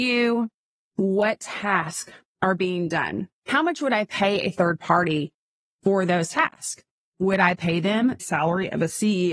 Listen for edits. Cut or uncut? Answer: cut